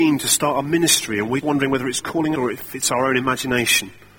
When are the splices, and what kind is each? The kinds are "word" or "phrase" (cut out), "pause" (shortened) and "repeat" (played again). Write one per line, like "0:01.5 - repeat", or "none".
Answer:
0:01.4 - word
0:02.0 - word
0:02.4 - word